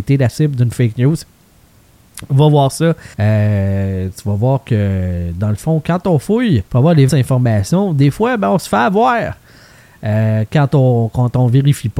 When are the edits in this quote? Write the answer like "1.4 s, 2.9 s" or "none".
3.1 s, 6.7 s, 7.1 s